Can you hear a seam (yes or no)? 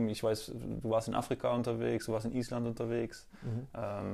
no